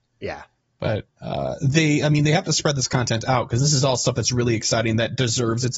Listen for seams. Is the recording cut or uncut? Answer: uncut